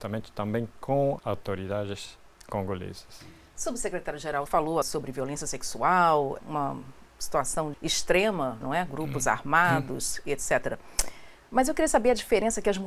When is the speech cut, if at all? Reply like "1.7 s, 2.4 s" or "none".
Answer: 1.2 s, 4.5 s, 4.8 s, 6.4 s, 7.7 s, 8.6 s